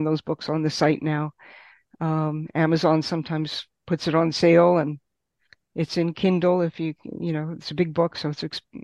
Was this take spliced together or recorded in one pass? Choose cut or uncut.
uncut